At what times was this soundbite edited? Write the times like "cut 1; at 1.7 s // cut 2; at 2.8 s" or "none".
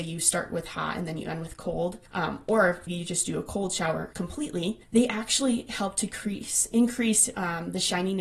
cut 1; at 2.1 s // cut 2; at 2.9 s // cut 3; at 4.1 s // cut 4; at 4.8 s